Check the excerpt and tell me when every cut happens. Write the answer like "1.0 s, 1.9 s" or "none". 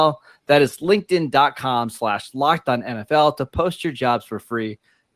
none